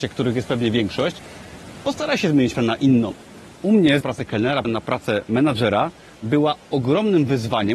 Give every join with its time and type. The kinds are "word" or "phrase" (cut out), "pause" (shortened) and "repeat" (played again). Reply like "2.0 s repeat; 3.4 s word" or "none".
2.5 s word; 4.0 s phrase; 4.6 s word